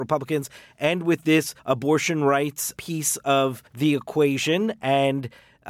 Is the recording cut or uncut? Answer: cut